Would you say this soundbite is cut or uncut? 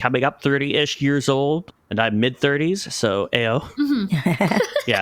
uncut